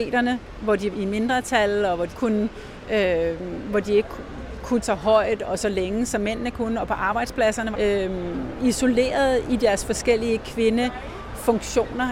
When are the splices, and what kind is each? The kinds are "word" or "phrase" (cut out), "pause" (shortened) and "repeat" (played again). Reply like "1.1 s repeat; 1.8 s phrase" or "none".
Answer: 0.9 s word; 2.1 s word; 4.8 s word; 7.7 s phrase